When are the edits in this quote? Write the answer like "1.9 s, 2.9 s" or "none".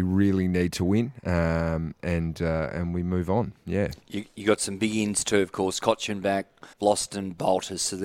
6.7 s